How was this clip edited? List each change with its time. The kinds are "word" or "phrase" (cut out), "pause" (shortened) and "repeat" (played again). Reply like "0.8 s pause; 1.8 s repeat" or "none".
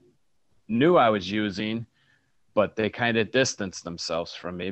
none